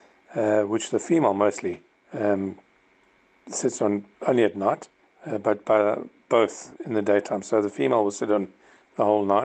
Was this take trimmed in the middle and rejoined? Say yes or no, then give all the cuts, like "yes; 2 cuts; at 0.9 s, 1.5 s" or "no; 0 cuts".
yes; 4 cuts; at 1.9 s, 4.1 s, 5.0 s, 6.8 s